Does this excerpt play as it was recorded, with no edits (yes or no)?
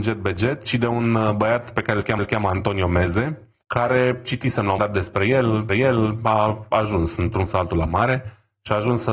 no